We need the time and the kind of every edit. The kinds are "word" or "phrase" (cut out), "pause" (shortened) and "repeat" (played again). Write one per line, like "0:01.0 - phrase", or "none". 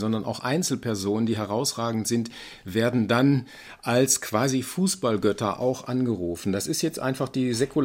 none